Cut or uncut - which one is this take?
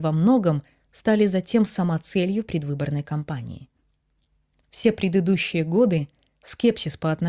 uncut